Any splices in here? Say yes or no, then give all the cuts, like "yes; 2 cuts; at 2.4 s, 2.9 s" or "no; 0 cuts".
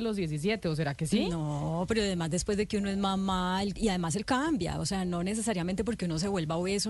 yes; 1 cut; at 4.2 s